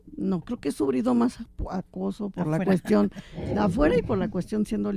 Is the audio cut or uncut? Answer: uncut